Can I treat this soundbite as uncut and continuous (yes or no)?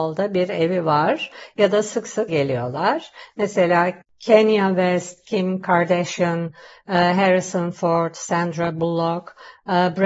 no